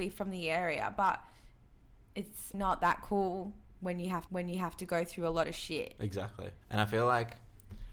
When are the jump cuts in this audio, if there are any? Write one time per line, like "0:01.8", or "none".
0:02.5
0:04.3
0:06.6